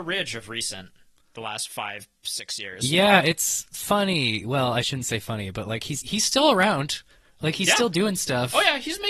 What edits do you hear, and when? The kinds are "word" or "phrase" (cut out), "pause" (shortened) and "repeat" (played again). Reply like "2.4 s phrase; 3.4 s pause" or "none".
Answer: 6.0 s word